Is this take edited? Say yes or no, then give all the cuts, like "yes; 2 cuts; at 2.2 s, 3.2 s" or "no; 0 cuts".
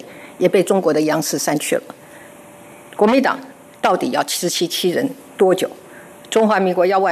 no; 0 cuts